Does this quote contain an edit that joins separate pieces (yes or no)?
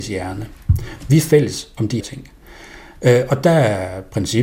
yes